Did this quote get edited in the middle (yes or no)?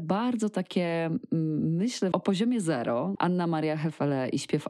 yes